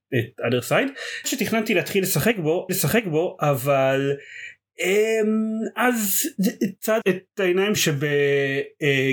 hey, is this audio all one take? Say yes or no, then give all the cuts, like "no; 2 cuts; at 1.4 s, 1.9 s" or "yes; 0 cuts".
no; 4 cuts; at 1.2 s, 2.7 s, 7.0 s, 7.8 s